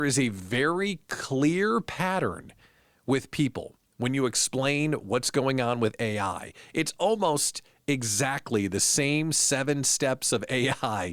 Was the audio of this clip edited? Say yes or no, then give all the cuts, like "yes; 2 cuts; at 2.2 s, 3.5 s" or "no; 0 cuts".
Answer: no; 0 cuts